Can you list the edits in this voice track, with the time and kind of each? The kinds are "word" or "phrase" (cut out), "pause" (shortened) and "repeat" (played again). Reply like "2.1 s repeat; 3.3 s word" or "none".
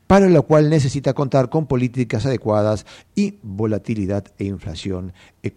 3.4 s word